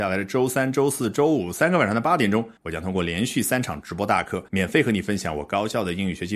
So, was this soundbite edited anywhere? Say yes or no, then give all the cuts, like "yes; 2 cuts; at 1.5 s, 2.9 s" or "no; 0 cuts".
yes; 2 cuts; at 2.6 s, 4.5 s